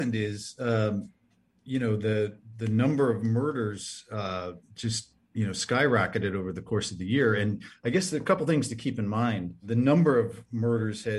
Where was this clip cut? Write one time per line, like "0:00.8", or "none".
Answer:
none